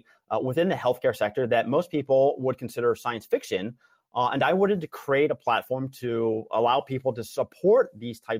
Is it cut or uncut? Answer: uncut